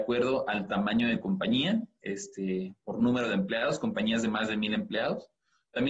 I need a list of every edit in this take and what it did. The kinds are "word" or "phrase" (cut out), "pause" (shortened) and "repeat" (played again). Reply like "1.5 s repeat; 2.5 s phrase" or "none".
none